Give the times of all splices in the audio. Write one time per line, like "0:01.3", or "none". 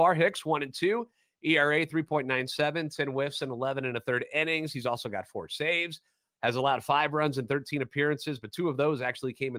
none